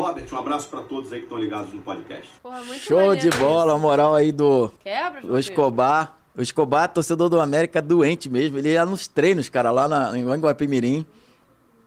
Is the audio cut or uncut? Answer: cut